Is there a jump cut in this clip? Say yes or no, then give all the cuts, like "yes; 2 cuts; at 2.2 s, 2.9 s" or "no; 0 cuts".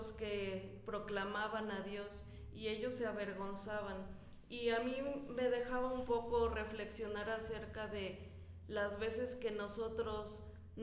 no; 0 cuts